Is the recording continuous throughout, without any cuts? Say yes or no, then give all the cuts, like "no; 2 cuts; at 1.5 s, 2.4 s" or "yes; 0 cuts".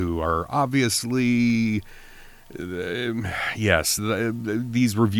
yes; 0 cuts